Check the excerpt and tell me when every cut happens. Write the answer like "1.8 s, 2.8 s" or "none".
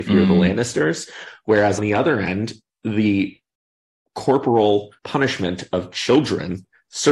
1.8 s, 5.0 s